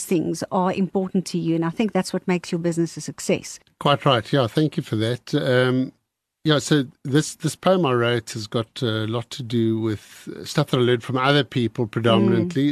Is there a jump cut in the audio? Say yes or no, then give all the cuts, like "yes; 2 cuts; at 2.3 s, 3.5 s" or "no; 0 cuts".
no; 0 cuts